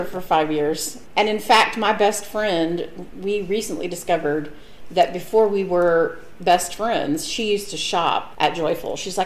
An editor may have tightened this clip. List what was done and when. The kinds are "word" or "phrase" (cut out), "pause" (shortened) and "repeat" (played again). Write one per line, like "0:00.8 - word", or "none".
none